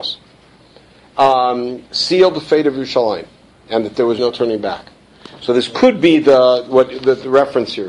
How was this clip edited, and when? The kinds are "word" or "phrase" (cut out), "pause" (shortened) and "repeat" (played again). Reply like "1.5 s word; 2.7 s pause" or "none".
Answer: 3.5 s pause; 4.2 s word